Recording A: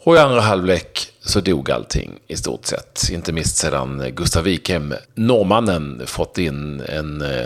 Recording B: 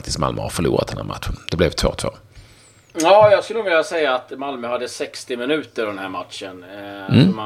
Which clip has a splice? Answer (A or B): A